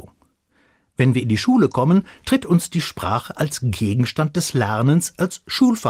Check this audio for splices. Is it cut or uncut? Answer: uncut